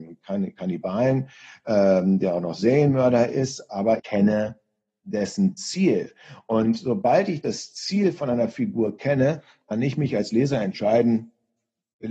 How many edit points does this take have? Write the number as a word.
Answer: one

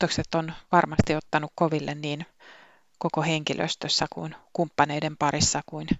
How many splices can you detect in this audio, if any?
zero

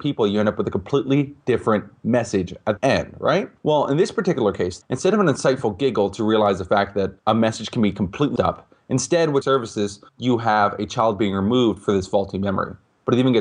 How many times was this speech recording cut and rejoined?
seven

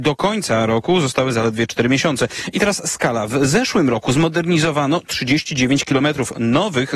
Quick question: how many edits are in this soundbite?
zero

